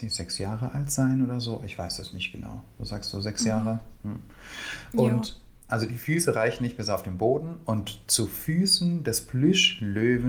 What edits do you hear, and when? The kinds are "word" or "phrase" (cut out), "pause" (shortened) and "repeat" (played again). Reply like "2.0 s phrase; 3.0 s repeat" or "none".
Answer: none